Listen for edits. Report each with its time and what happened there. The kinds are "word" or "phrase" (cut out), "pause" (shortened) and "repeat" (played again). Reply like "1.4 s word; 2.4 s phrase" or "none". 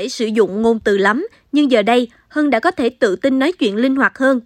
none

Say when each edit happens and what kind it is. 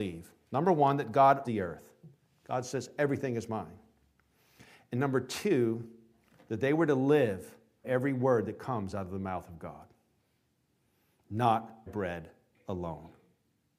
1.4 s word; 7.8 s word; 11.9 s word

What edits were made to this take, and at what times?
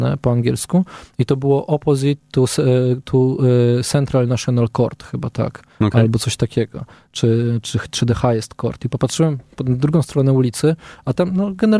none

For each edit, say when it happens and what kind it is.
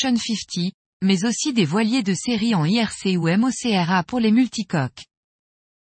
none

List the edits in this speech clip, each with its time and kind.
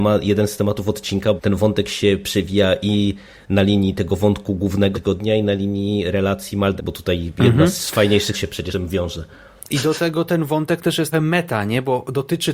1.4 s word; 4.9 s word; 6.8 s word; 8.3 s word; 8.7 s word; 11.1 s word

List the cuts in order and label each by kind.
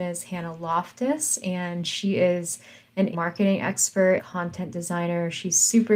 3.1 s word; 4.2 s word

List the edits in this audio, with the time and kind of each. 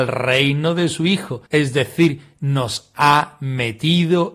1.5 s pause

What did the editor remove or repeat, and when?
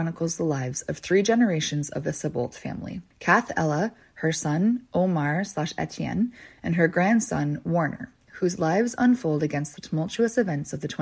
3.1 s pause

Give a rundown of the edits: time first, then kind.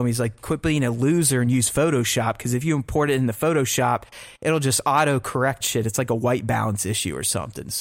5.6 s word

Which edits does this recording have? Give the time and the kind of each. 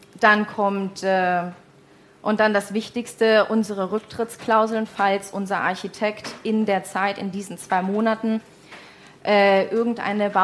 none

